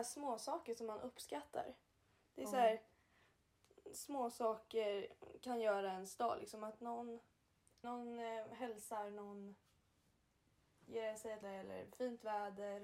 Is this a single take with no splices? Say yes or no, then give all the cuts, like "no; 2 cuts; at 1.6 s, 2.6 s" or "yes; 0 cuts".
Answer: no; 2 cuts; at 7.8 s, 11.4 s